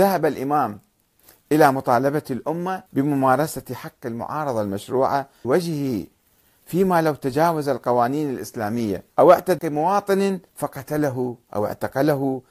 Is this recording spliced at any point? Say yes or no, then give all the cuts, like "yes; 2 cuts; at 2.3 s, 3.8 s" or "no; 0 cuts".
yes; 5 cuts; at 2.9 s, 5.4 s, 9.1 s, 9.6 s, 10.5 s